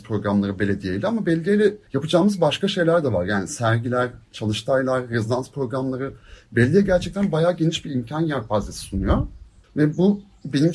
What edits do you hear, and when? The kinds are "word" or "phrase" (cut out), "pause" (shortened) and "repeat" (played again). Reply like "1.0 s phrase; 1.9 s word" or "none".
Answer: 1.9 s pause; 9.6 s pause